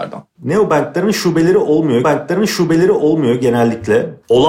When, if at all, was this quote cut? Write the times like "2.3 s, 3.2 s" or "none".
2.0 s